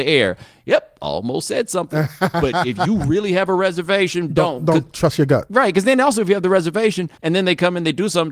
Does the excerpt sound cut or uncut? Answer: cut